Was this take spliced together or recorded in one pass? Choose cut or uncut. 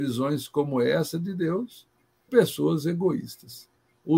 cut